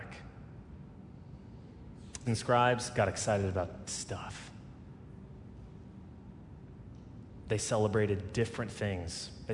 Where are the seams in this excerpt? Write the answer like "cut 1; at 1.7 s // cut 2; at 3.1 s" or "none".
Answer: cut 1; at 2.3 s // cut 2; at 3.9 s